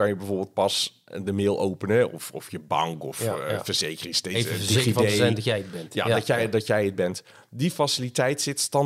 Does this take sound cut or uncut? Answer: uncut